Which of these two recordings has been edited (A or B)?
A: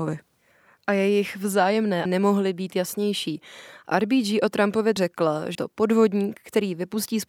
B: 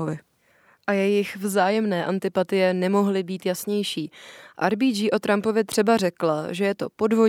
A